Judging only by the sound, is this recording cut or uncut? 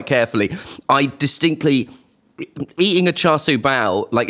uncut